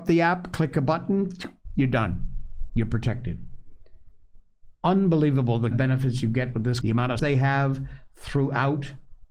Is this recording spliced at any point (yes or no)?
yes